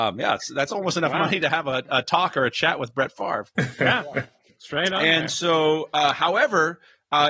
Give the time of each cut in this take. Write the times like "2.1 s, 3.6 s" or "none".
none